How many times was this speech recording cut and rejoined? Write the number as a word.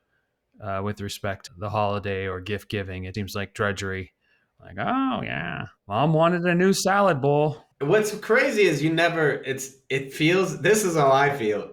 four